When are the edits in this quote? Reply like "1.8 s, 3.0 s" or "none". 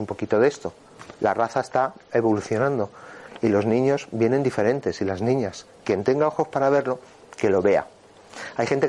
none

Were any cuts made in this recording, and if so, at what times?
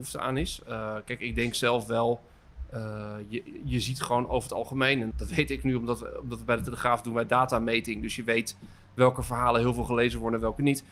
5.1 s

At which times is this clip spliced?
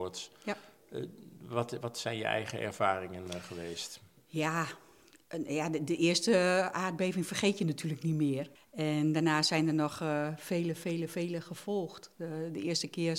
8.6 s

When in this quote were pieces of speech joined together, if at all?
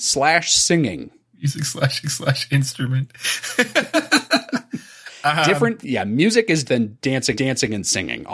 2.0 s, 5.8 s, 6.6 s, 7.3 s

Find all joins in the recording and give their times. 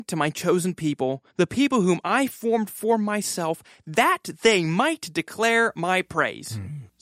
1.3 s

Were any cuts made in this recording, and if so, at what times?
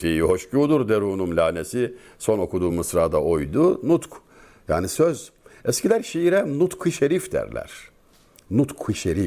none

